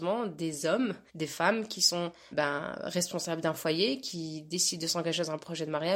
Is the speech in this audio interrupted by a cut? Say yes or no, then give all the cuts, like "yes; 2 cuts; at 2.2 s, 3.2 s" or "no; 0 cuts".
yes; 2 cuts; at 1.1 s, 2.3 s